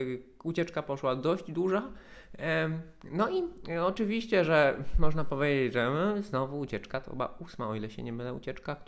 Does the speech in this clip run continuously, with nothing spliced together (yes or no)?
yes